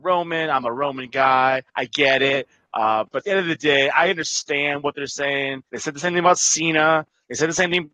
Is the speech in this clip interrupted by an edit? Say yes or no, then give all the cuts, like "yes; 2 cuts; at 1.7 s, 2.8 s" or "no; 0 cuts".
yes; 2 cuts; at 1.7 s, 5.7 s